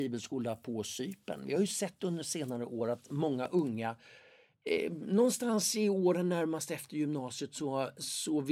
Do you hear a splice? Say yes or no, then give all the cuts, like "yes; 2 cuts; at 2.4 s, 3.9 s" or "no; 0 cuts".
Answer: no; 0 cuts